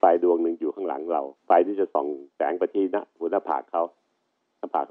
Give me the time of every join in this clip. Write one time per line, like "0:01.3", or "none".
0:01.4
0:02.3